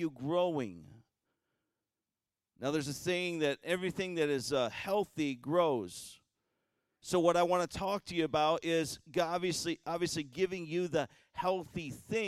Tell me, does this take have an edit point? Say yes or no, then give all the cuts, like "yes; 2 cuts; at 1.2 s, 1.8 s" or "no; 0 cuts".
no; 0 cuts